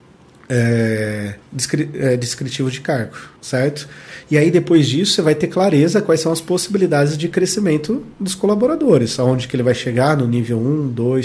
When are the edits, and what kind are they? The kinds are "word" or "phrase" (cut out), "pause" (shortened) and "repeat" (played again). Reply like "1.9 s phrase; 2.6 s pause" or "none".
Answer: 1.4 s pause; 3.4 s pause; 8.1 s pause